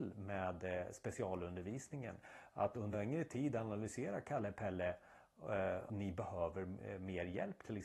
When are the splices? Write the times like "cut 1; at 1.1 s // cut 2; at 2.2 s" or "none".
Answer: cut 1; at 2.9 s // cut 2; at 5.9 s

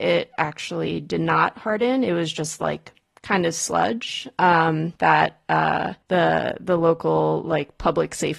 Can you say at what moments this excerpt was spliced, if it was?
cut 1; at 5.0 s // cut 2; at 6.0 s

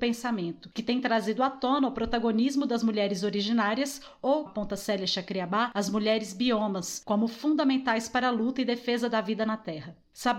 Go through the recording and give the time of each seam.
cut 1; at 4.5 s

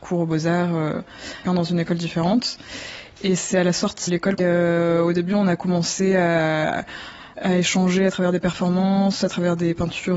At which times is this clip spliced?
cut 1; at 1.5 s // cut 2; at 4.1 s // cut 3; at 4.4 s

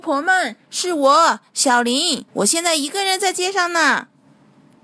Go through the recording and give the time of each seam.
cut 1; at 2.3 s

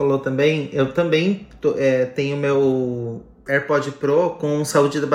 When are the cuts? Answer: none

